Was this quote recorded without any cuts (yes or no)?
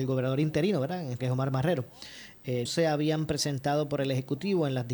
no